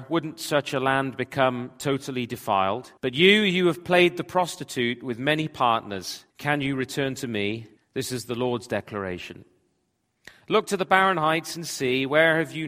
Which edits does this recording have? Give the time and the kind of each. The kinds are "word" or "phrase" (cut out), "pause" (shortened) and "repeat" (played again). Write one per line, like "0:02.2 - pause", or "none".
0:03.0 - pause
0:06.3 - pause
0:07.8 - pause